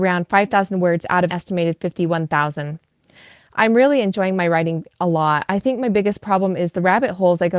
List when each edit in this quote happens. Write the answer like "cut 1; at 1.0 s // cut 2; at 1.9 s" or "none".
cut 1; at 1.3 s